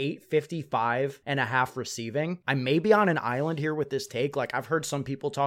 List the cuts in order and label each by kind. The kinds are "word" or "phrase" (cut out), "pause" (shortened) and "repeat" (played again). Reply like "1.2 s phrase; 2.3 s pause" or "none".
none